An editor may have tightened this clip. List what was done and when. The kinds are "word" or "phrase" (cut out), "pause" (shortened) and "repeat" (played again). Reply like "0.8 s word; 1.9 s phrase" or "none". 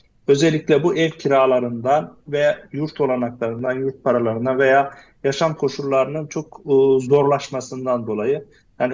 none